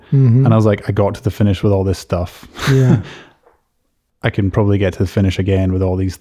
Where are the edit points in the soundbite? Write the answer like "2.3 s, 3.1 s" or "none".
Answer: none